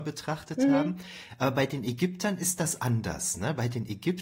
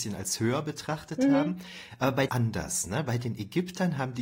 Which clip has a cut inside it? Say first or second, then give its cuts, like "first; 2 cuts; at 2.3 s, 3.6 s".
second; 1 cut; at 2.3 s